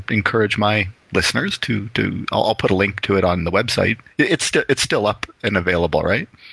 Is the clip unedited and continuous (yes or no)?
yes